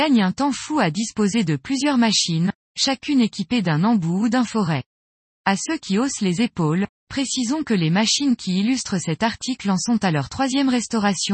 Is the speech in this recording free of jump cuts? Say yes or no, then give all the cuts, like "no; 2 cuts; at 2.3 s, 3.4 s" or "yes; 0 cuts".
yes; 0 cuts